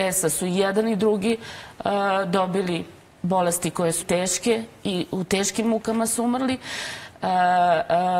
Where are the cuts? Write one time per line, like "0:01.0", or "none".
0:04.0